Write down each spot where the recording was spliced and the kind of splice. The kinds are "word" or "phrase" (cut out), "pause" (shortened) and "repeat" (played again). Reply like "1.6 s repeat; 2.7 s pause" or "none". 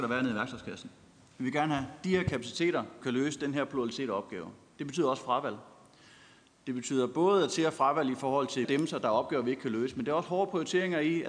3.0 s word; 8.6 s word